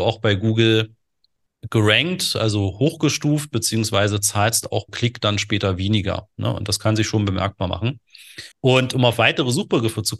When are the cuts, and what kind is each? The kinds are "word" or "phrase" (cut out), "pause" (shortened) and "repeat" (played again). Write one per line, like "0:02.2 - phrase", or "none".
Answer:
0:04.9 - word
0:08.5 - pause